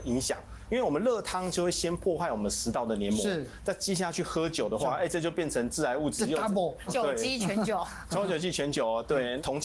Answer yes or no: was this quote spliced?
yes